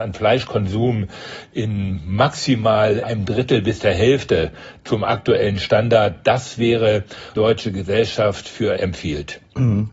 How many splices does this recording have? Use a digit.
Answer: 3